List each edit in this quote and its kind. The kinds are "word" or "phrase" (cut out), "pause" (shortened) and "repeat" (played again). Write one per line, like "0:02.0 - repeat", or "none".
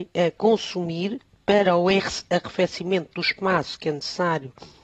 none